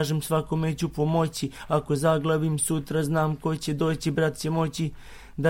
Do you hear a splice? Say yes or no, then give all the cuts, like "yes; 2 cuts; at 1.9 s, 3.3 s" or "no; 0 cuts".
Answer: no; 0 cuts